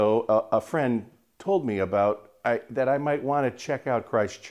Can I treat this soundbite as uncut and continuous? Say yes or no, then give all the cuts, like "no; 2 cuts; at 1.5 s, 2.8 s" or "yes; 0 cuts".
yes; 0 cuts